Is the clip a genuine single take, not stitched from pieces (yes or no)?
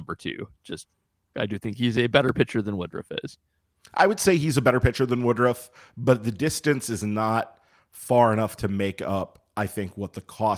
yes